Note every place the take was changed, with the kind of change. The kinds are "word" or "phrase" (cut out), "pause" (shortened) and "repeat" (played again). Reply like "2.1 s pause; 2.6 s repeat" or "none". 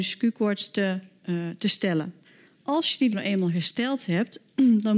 2.2 s pause; 3.1 s word